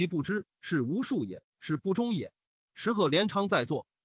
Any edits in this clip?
yes; 1 cut; at 1.5 s

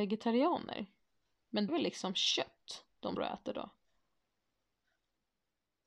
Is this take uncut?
no; 2 cuts; at 1.7 s, 3.2 s

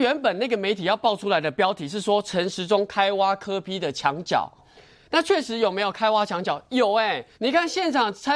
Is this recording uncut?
no; 2 cuts; at 4.6 s, 7.3 s

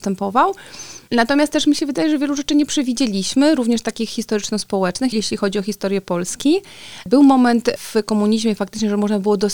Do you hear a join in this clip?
no; 0 cuts

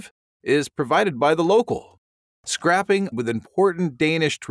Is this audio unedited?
no; 1 cut; at 3.1 s

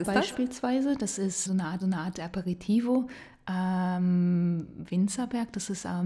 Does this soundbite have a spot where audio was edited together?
yes; 2 cuts; at 1.5 s, 1.8 s

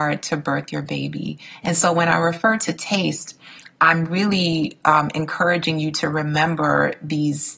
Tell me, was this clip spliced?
no; 0 cuts

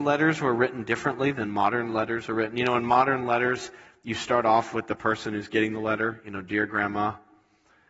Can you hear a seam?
no; 0 cuts

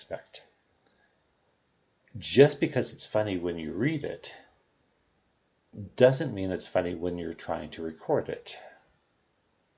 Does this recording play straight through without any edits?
yes; 0 cuts

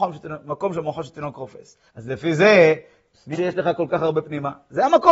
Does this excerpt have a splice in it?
yes; 2 cuts; at 1.9 s, 3.3 s

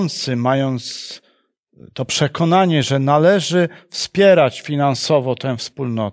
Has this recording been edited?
no; 0 cuts

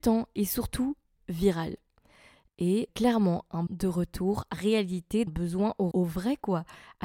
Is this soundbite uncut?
no; 6 cuts; at 1.2 s, 2.9 s, 3.7 s, 4.5 s, 5.3 s, 5.9 s

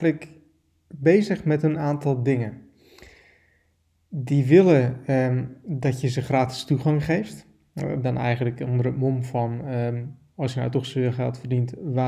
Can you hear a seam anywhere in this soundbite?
no; 0 cuts

